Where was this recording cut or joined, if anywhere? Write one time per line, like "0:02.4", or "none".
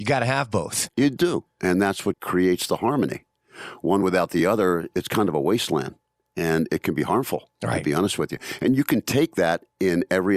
none